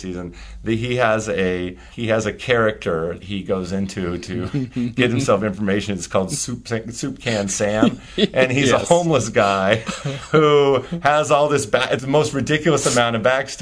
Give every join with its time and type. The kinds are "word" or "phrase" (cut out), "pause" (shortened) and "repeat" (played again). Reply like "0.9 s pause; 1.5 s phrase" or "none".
1.9 s pause; 3.2 s word; 12.0 s word